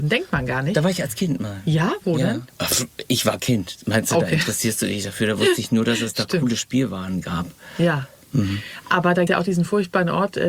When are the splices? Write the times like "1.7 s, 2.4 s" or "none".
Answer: 2.5 s, 9.3 s